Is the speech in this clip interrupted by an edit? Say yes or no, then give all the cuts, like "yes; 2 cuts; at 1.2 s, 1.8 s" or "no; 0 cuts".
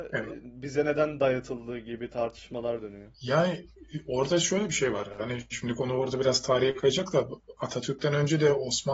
yes; 1 cut; at 3.1 s